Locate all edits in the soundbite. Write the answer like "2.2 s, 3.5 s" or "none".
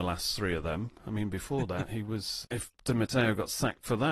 2.7 s